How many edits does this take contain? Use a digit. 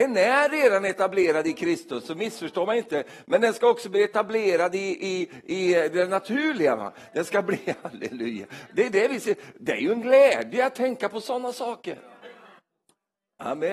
0